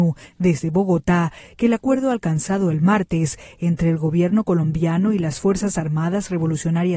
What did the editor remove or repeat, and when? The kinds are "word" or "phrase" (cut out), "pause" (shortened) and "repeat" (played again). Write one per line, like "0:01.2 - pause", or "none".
none